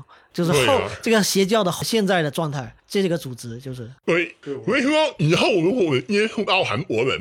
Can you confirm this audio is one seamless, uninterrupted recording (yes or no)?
no